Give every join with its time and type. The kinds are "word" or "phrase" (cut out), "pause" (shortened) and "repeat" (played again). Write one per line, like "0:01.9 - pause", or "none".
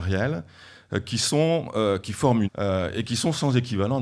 0:02.4 - phrase